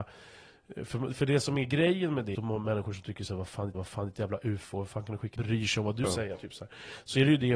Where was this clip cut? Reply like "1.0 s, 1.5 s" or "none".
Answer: 2.3 s, 3.7 s, 5.4 s, 6.0 s

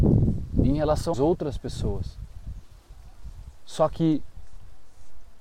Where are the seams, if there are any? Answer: 1.1 s, 3.5 s

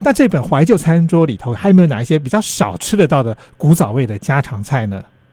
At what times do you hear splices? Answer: none

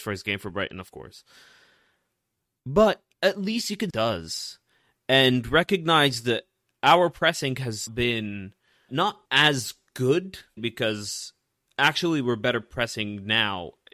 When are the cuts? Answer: 3.1 s, 3.9 s, 7.9 s, 8.9 s, 9.3 s, 10.6 s

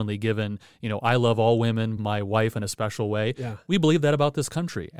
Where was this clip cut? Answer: 2.0 s

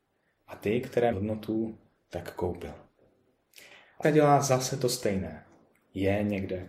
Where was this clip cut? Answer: 1.1 s, 4.0 s

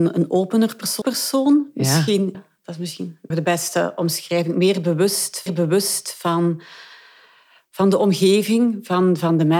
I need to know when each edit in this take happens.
1.0 s, 2.3 s, 3.3 s, 5.5 s

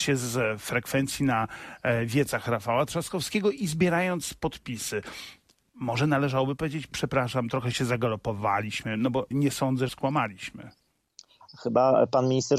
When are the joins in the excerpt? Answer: 9.3 s, 9.9 s

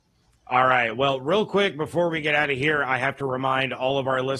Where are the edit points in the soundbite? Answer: none

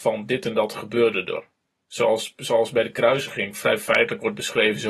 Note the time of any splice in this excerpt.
none

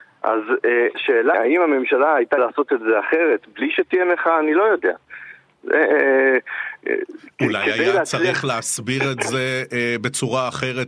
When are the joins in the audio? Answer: 0.9 s, 1.3 s, 2.4 s

